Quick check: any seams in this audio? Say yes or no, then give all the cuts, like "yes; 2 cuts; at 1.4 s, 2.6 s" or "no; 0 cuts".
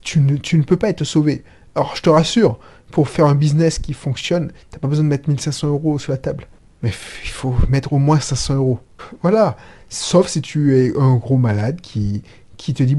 no; 0 cuts